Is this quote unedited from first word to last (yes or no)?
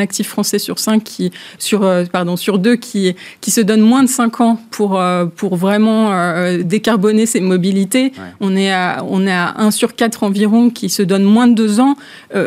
yes